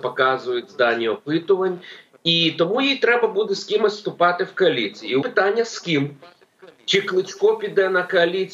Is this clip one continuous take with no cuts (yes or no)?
no